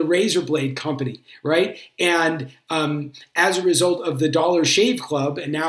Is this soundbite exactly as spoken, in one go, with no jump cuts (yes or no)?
yes